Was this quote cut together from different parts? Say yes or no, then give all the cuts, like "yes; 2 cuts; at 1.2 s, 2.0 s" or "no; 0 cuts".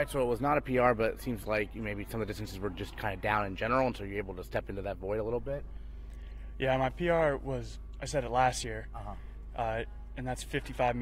no; 0 cuts